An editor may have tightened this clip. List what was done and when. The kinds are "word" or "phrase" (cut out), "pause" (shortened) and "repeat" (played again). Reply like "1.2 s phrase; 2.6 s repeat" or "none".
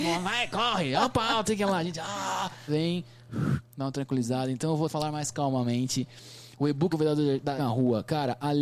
1.5 s word; 2.7 s word; 4.9 s word; 6.9 s word; 7.6 s word